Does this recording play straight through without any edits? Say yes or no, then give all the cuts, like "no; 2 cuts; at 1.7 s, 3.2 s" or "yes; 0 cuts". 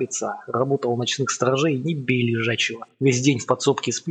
no; 1 cut; at 2.9 s